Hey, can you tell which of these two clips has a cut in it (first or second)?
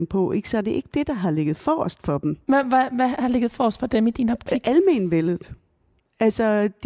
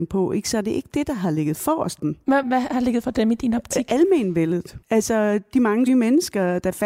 second